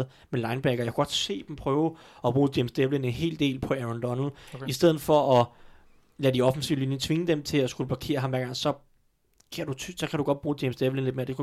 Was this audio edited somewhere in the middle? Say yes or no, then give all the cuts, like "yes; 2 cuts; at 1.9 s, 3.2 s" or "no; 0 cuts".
no; 0 cuts